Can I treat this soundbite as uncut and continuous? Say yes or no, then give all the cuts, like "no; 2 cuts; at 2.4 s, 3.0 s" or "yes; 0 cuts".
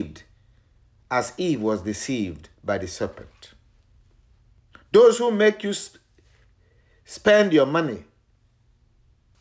yes; 0 cuts